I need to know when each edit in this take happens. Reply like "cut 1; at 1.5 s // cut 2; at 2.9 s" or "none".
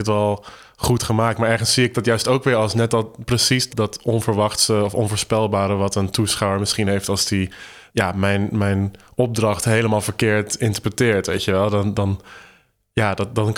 cut 1; at 3.7 s // cut 2; at 7.9 s